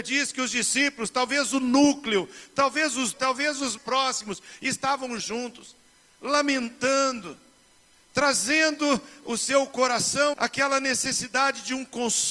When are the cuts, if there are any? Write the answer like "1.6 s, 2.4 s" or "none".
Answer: 3.1 s, 3.8 s, 5.2 s, 10.3 s